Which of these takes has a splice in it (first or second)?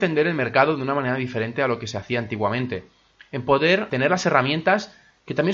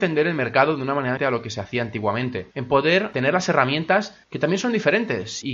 second